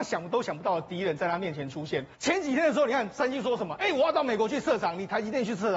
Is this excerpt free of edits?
no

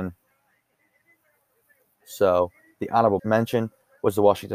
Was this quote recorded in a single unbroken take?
no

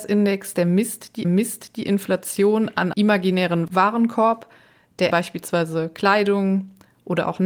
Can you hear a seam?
yes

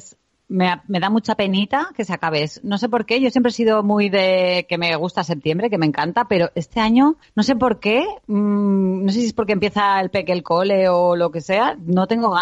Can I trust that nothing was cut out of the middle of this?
no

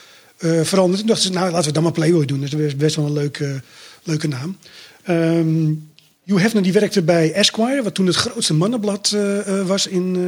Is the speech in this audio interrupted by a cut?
no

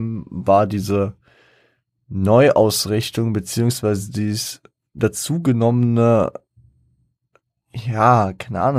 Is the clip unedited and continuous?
yes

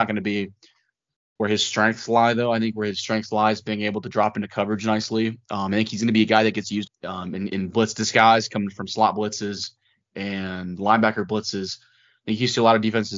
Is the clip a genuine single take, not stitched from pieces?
no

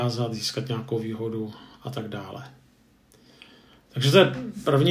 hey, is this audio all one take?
yes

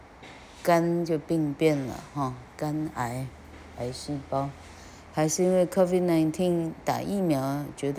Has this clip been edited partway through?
no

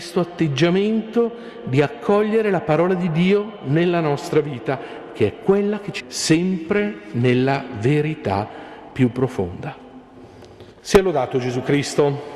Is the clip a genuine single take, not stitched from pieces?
no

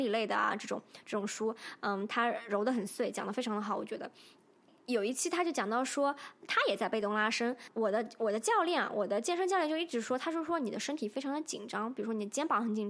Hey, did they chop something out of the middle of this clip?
no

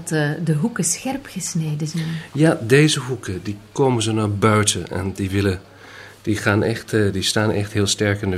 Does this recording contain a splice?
no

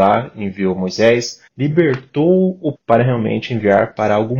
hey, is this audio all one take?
no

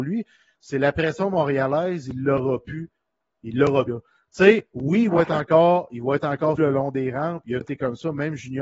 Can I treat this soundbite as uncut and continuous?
no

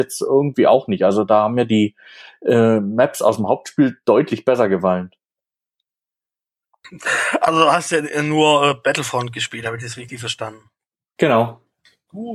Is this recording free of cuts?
yes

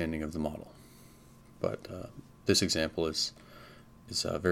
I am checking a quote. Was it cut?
no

